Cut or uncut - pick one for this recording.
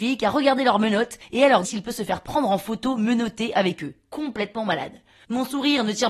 cut